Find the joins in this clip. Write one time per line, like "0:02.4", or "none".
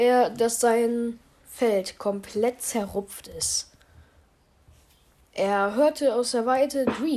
none